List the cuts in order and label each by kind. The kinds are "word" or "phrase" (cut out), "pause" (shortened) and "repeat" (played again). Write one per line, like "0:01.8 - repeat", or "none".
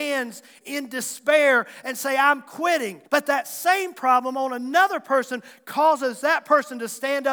0:03.1 - pause